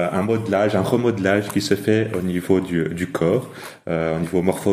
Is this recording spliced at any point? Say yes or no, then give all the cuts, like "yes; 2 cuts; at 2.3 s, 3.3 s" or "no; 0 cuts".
no; 0 cuts